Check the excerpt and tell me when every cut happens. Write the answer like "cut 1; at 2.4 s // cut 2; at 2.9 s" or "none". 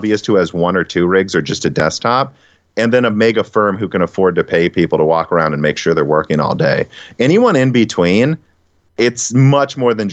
none

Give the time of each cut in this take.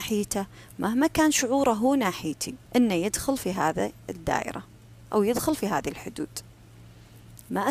cut 1; at 2.7 s

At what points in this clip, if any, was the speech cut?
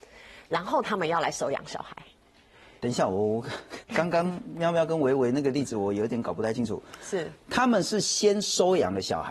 cut 1; at 3.8 s

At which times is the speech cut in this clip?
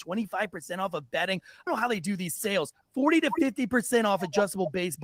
cut 1; at 1.7 s

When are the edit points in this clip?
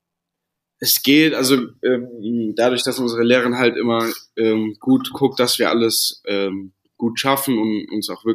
none

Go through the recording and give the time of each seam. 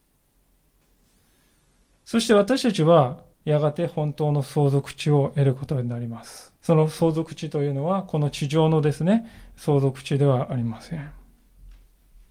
cut 1; at 3.3 s // cut 2; at 6.6 s

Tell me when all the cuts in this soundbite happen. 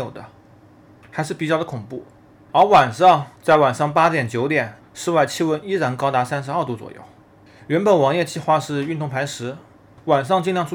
cut 1; at 2.3 s // cut 2; at 3.3 s // cut 3; at 4.8 s // cut 4; at 9.7 s

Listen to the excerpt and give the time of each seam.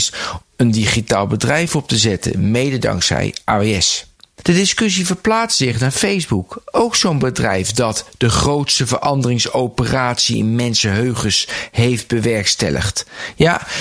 none

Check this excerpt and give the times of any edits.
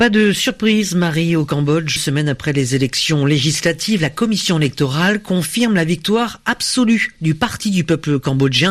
cut 1; at 2.0 s

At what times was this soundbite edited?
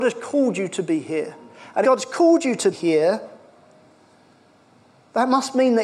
cut 1; at 1.8 s // cut 2; at 2.7 s

